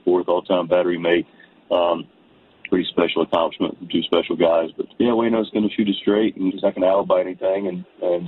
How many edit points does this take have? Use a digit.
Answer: 2